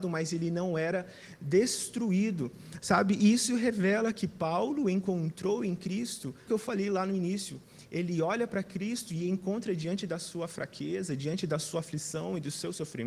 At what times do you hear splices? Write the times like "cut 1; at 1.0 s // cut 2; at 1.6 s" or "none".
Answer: cut 1; at 6.5 s